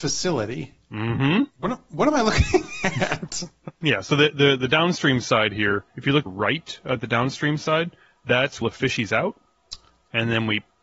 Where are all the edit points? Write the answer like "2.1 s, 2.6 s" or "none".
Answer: 1.5 s, 5.9 s, 6.3 s, 8.6 s